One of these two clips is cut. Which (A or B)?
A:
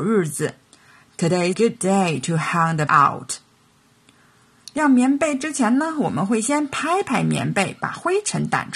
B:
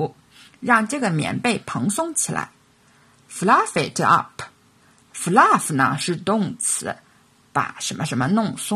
A